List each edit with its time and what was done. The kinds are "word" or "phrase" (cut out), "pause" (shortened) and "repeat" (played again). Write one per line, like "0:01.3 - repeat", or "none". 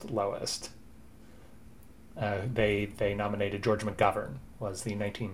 none